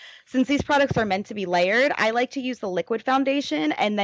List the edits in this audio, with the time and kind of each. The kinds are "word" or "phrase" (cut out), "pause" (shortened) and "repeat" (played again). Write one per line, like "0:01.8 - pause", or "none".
none